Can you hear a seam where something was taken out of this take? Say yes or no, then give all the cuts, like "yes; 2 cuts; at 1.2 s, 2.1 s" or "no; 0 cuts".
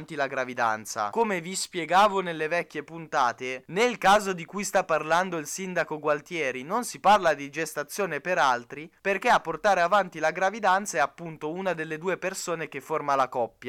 no; 0 cuts